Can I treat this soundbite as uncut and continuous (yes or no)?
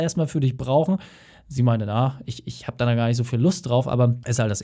yes